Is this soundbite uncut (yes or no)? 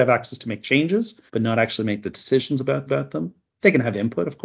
no